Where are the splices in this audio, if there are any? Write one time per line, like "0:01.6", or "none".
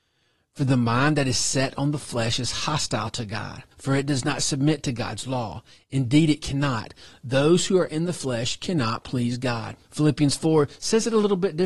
0:03.7
0:09.8